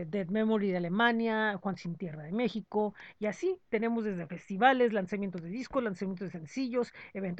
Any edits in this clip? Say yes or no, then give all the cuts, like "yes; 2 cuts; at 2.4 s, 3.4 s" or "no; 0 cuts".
no; 0 cuts